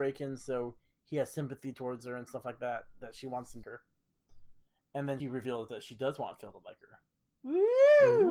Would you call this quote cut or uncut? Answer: cut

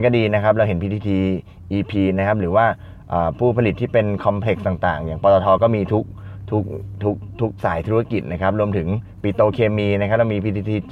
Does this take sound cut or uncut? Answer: uncut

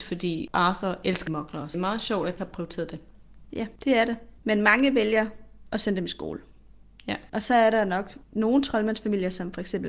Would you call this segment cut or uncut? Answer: cut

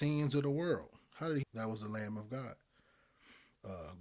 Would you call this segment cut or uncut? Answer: cut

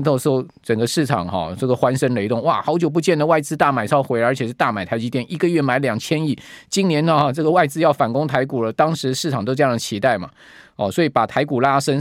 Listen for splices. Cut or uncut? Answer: uncut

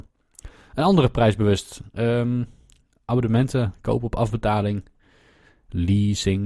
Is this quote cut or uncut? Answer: uncut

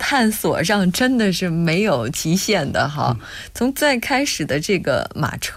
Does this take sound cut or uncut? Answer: uncut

